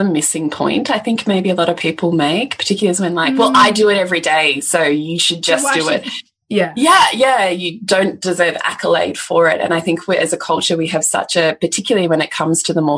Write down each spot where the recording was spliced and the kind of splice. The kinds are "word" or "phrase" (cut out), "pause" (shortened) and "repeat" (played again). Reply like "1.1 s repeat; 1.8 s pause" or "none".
none